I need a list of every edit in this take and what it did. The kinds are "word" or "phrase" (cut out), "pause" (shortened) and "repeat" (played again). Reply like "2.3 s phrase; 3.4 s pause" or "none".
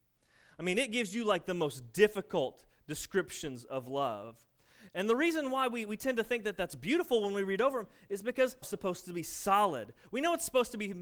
8.6 s phrase